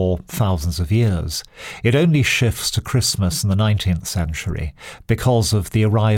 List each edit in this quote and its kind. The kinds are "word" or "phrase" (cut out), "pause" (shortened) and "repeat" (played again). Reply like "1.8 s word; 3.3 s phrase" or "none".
none